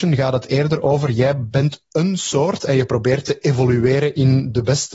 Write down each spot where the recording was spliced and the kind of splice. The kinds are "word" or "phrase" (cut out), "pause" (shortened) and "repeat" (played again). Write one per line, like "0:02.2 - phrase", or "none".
none